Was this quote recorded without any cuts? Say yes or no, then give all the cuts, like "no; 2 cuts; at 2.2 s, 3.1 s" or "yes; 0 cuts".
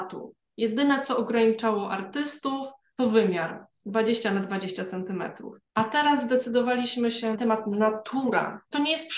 no; 1 cut; at 7.3 s